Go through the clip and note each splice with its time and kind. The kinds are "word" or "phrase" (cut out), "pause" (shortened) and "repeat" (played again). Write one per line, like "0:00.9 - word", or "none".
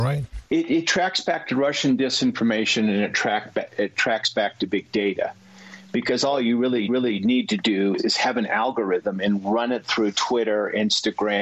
0:06.9 - repeat
0:08.0 - word